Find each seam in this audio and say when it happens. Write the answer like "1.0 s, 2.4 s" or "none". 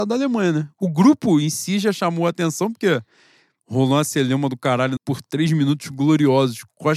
5.0 s